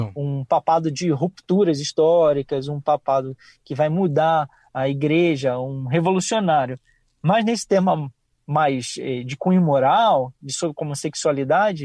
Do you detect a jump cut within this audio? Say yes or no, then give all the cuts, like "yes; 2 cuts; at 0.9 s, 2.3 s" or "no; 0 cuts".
no; 0 cuts